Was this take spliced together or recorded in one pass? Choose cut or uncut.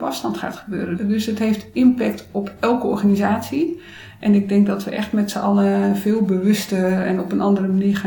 uncut